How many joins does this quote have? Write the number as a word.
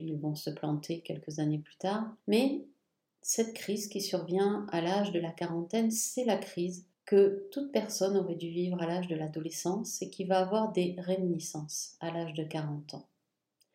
two